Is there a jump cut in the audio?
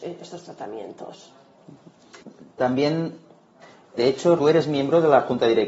yes; 2 cuts; at 4.0 s, 4.4 s

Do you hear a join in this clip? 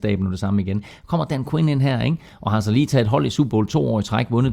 no; 0 cuts

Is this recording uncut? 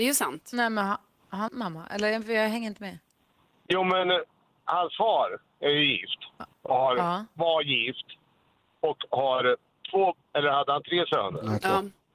no; 2 cuts; at 1.5 s, 10.2 s

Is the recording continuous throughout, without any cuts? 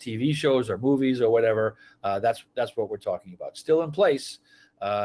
yes; 0 cuts

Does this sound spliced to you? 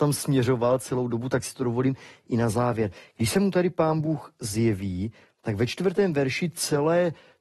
no; 0 cuts

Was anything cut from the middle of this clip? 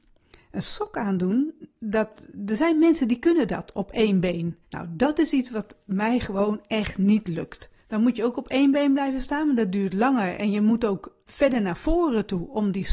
yes; 3 cuts; at 4.6 s, 7.8 s, 11.2 s

